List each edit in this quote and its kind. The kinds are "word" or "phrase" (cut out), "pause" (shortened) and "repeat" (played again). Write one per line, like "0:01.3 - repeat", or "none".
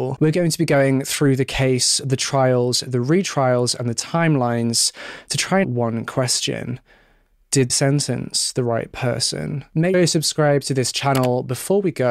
0:05.6 - word
0:07.7 - word
0:09.9 - word